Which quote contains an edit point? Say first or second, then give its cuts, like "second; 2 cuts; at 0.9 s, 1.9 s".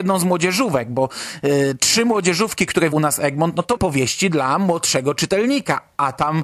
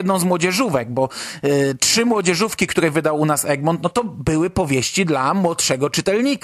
first; 2 cuts; at 2.9 s, 3.8 s